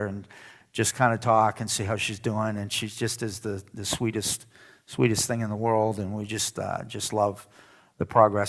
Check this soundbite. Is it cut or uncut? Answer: uncut